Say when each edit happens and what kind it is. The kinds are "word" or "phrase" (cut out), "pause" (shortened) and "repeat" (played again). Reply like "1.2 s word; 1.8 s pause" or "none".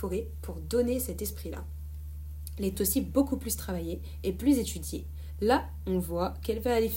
2.7 s phrase